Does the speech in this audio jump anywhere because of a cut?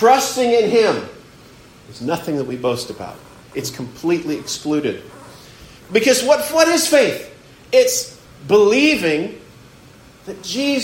yes; 1 cut; at 8.3 s

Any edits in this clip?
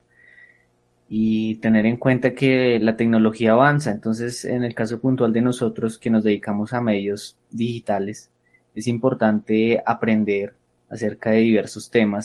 no; 0 cuts

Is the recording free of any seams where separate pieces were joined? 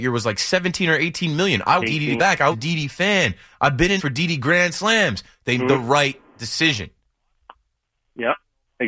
no; 5 cuts; at 1.8 s, 2.2 s, 2.5 s, 4.0 s, 5.6 s

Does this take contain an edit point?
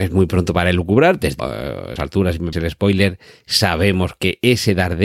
yes; 3 cuts; at 1.4 s, 2.0 s, 2.5 s

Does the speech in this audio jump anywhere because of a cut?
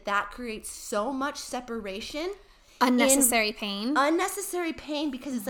no; 0 cuts

